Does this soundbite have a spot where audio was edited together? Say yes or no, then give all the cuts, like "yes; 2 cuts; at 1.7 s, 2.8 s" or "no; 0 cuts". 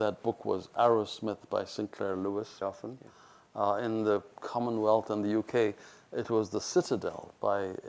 yes; 1 cut; at 2.6 s